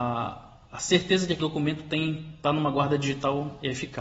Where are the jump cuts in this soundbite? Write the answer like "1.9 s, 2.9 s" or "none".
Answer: 1.4 s